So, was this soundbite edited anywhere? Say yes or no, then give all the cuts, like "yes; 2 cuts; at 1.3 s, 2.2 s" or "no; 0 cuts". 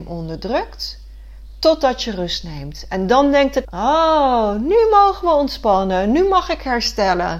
yes; 1 cut; at 3.6 s